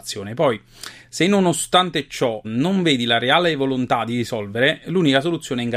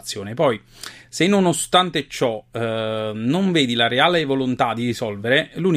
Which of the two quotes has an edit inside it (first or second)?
first